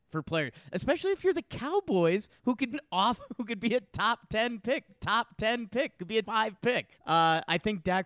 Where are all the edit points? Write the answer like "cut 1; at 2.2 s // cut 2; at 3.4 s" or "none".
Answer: cut 1; at 2.4 s // cut 2; at 2.7 s // cut 3; at 4.9 s // cut 4; at 6.2 s // cut 5; at 6.9 s